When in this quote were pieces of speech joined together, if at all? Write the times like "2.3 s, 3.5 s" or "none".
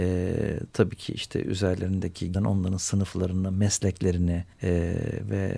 2.3 s, 4.5 s